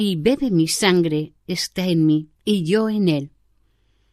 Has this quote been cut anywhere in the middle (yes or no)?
yes